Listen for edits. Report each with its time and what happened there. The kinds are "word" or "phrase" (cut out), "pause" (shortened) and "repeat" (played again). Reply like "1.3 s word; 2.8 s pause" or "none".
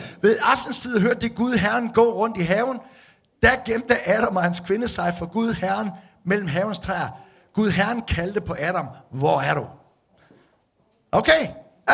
none

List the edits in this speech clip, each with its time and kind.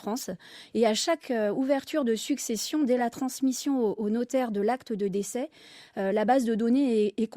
none

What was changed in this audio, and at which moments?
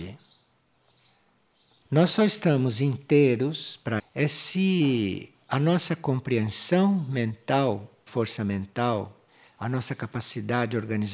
4.0 s word; 8.1 s word

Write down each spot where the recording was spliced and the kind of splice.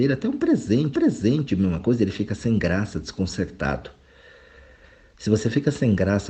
0.9 s repeat

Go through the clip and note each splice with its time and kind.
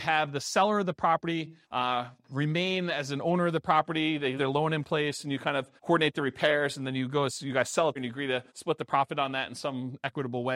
1.6 s pause; 4.4 s word; 5.8 s pause; 8.0 s word; 8.5 s pause

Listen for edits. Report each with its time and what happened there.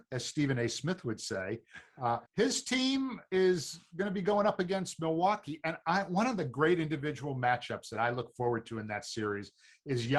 2.3 s pause

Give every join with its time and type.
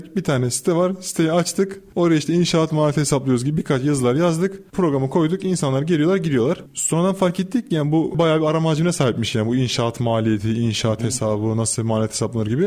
none

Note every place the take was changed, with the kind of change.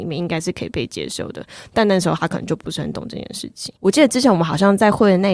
3.8 s pause

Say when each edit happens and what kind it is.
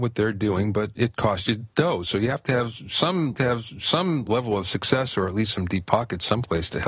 3.3 s repeat

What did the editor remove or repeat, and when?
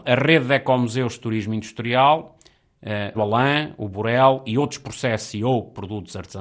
3.1 s word

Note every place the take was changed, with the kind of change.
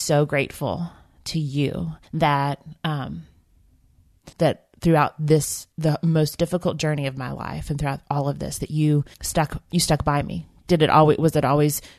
2.0 s pause; 4.3 s pause; 5.7 s pause; 9.1 s pause

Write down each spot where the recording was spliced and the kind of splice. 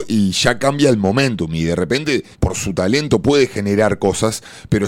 2.3 s pause

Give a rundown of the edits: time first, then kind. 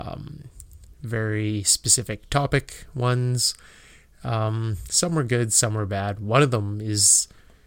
none

